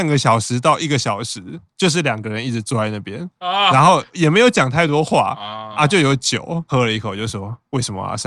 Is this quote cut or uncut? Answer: uncut